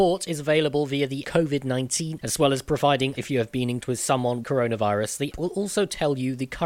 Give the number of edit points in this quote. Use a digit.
6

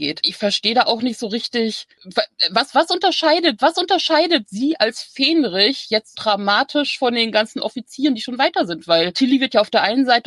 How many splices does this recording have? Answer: 2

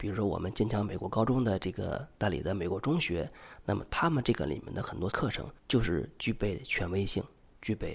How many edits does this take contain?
2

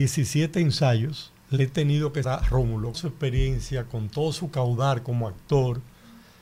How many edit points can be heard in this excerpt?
3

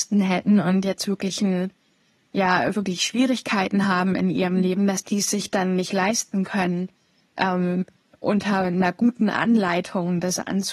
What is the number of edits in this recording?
0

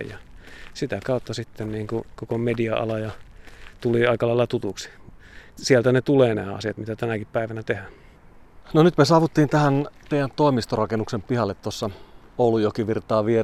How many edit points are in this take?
1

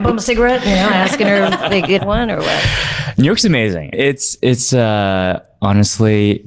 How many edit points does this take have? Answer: 3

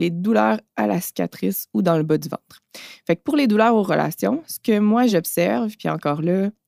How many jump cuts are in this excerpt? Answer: 0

